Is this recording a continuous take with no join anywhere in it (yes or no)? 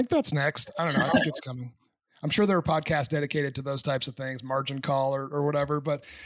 yes